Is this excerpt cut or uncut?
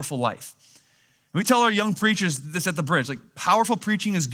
uncut